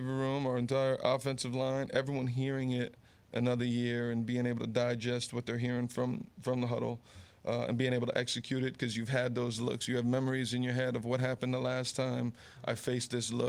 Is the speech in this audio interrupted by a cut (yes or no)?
no